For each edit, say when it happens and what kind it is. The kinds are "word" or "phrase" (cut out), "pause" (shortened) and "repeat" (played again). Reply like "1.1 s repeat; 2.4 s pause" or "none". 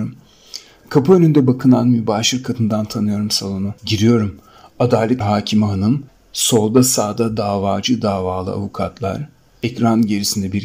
3.8 s pause; 5.2 s phrase